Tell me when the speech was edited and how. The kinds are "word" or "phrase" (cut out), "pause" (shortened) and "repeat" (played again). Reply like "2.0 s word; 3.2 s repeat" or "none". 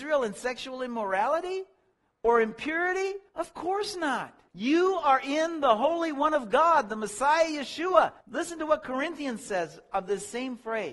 1.9 s pause; 3.3 s pause; 4.5 s pause; 8.2 s pause